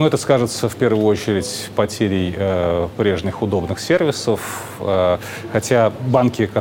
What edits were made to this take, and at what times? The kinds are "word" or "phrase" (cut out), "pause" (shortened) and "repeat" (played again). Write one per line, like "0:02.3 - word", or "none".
none

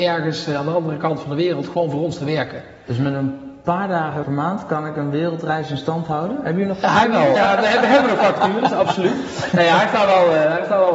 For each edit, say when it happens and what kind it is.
0:04.2 - word
0:07.4 - word

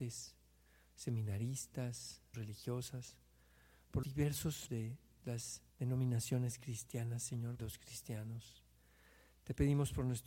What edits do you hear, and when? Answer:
0:02.3 - word
0:04.0 - word
0:04.7 - word
0:05.7 - pause
0:07.6 - phrase

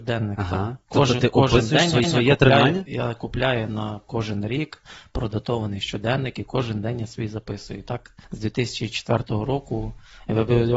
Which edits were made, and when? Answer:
0:02.0 - repeat
0:08.2 - pause

